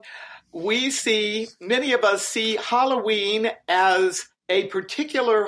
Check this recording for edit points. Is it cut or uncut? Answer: uncut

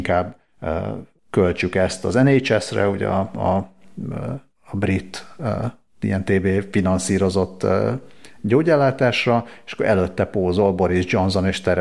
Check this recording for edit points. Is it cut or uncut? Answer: uncut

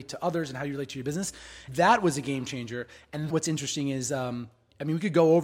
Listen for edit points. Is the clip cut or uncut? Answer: cut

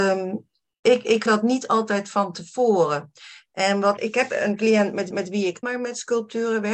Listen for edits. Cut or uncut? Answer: cut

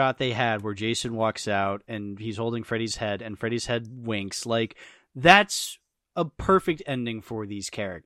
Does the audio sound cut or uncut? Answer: uncut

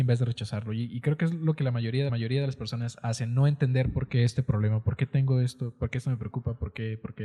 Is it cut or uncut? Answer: cut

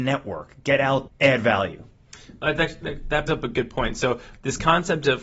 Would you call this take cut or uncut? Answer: cut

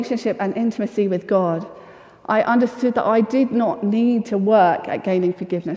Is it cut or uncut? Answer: uncut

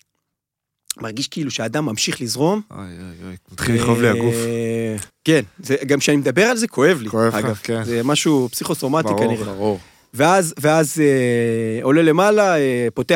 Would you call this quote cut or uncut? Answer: cut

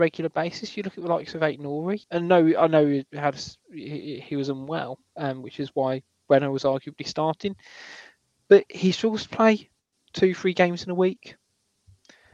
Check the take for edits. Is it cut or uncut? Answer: cut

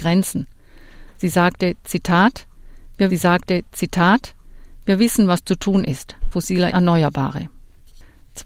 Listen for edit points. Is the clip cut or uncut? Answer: cut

